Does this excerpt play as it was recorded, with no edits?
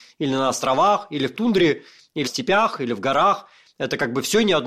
no; 2 cuts; at 1.3 s, 2.2 s

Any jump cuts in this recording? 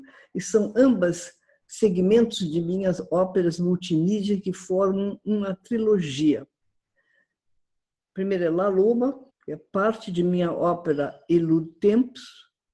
yes; 1 cut; at 9.3 s

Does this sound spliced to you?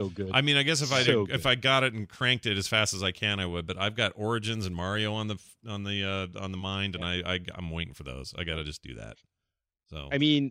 no; 0 cuts

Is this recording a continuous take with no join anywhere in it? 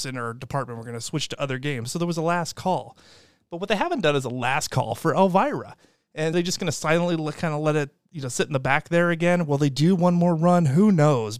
no; 1 cut; at 6.3 s

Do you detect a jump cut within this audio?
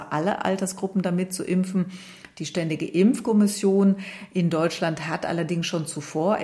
no; 0 cuts

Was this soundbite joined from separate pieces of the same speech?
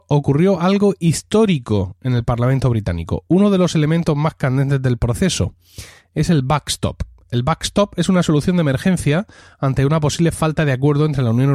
no; 0 cuts

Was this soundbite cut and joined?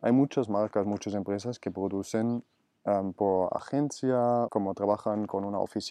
yes; 1 cut; at 4.5 s

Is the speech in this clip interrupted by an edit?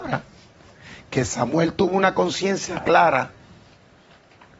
no; 0 cuts

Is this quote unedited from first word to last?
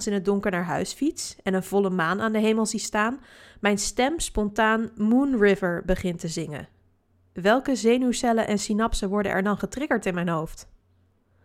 yes; 0 cuts

